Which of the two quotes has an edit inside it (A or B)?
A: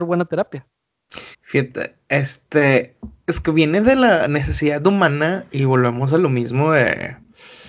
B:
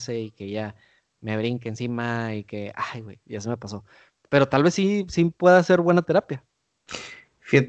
A